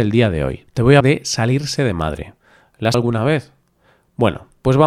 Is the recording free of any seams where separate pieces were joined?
no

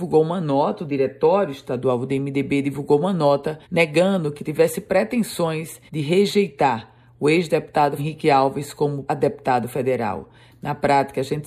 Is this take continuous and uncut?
no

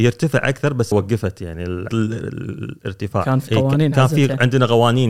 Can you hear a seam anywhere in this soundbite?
yes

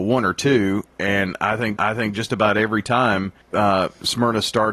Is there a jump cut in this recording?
yes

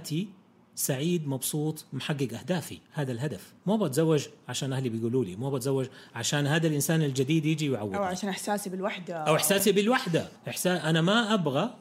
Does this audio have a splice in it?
yes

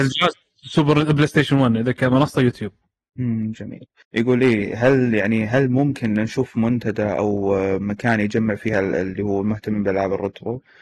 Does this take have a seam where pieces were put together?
no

